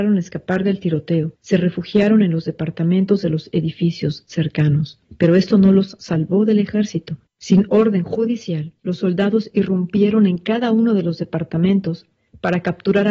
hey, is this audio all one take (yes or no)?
no